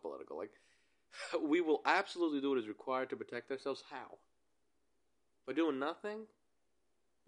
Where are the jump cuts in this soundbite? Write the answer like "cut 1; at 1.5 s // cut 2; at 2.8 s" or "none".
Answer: none